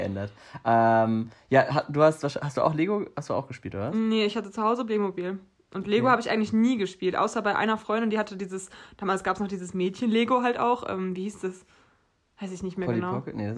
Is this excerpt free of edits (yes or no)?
yes